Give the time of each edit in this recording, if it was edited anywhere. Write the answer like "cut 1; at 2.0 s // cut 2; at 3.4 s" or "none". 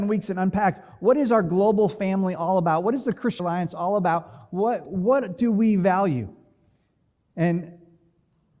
cut 1; at 3.4 s